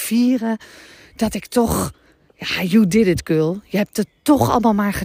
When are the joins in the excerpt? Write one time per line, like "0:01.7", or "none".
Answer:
none